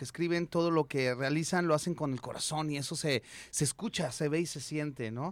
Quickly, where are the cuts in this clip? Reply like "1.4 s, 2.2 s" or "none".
none